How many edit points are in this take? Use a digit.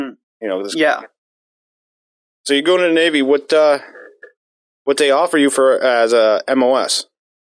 0